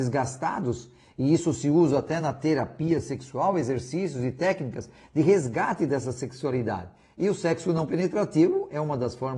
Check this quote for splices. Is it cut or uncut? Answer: uncut